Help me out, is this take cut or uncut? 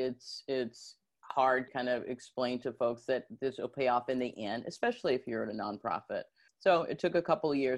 cut